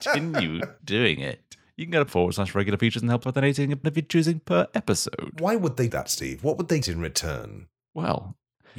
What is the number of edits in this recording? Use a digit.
5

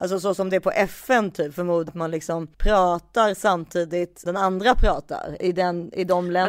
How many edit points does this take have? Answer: 4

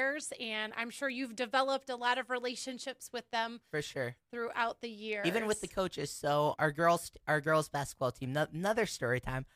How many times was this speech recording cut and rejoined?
1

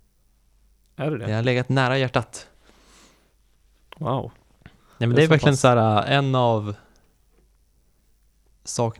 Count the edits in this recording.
0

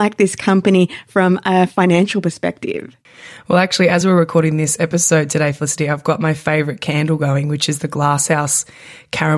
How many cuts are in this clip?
0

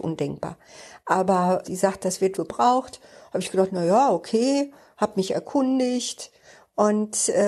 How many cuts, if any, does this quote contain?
2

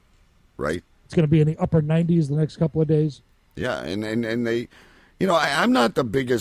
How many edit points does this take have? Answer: 0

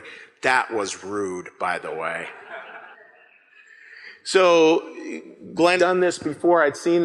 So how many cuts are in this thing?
2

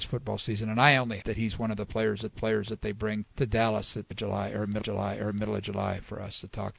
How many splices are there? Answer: 5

